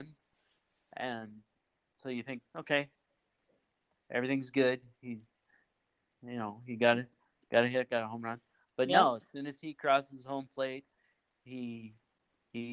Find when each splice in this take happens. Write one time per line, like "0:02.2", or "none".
none